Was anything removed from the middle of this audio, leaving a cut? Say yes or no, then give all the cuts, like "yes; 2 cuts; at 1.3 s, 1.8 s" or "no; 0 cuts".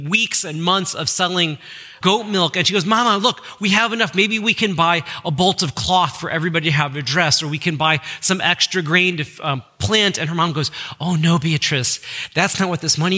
yes; 1 cut; at 2.0 s